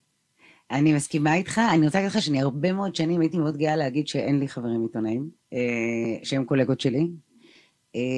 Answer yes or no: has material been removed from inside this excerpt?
yes